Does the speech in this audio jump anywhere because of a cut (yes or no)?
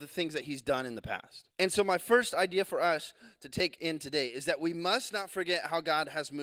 yes